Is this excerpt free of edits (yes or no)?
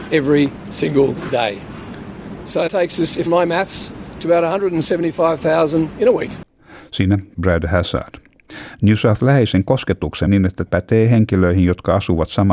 no